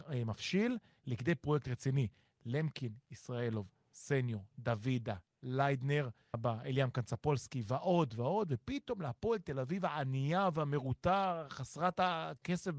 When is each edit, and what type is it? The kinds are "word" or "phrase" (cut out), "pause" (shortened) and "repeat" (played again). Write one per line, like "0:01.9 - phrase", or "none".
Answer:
0:06.3 - word
0:08.1 - word